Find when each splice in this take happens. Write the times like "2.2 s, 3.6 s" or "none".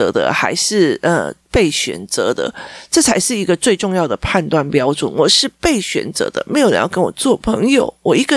1.4 s